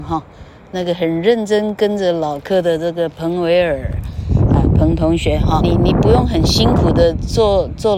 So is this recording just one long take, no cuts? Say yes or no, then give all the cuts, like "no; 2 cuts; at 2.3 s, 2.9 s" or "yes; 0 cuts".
no; 1 cut; at 5.6 s